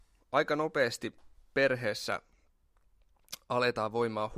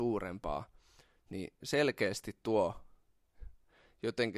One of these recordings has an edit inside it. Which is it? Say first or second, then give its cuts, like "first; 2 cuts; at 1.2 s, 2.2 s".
second; 1 cut; at 1.6 s